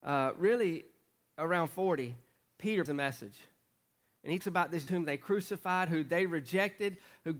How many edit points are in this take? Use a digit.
3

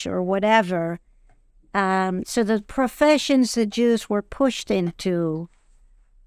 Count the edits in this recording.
0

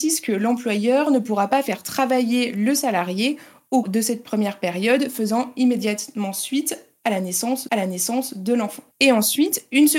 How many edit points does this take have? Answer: 3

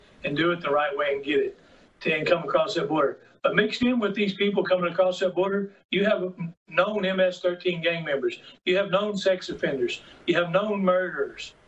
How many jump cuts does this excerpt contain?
0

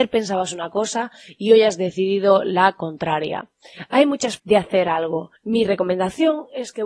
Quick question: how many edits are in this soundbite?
2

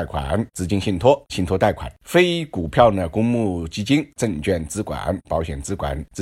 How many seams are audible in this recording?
0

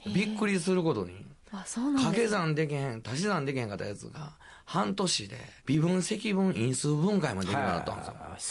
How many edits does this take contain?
2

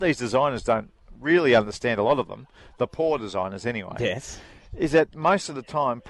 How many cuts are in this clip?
0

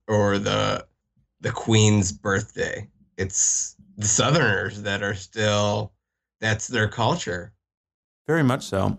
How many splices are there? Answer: 0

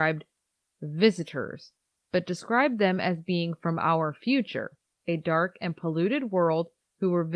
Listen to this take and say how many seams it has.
0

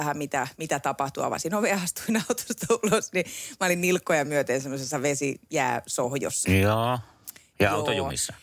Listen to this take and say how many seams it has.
0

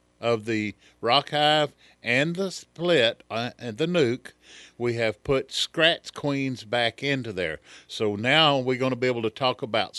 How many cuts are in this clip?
0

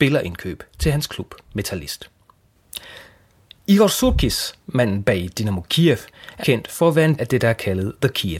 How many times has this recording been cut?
2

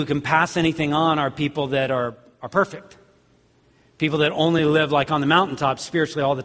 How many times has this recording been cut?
0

